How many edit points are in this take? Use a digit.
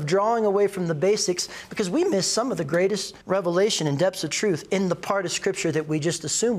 1